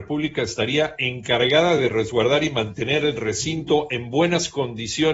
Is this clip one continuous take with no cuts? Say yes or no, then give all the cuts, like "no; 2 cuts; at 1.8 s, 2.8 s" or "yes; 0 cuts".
yes; 0 cuts